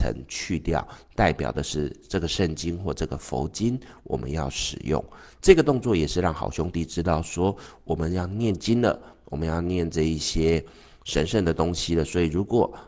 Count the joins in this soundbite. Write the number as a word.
zero